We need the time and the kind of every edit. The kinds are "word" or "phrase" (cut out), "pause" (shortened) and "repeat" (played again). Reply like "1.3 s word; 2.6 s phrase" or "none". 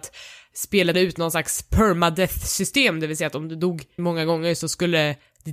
0.9 s word; 4.0 s word